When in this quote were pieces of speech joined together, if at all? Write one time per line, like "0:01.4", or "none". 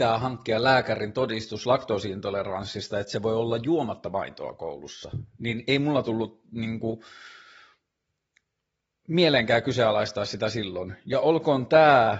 none